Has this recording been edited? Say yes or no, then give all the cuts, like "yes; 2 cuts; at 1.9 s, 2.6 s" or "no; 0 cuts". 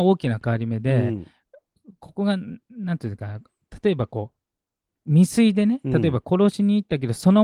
no; 0 cuts